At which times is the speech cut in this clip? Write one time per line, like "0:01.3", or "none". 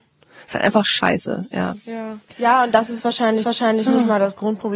0:02.3
0:03.4